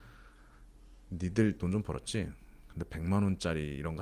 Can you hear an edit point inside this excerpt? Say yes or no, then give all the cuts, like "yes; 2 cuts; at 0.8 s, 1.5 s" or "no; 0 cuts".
yes; 1 cut; at 1.6 s